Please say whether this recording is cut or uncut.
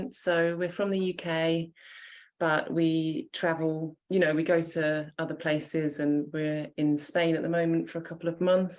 cut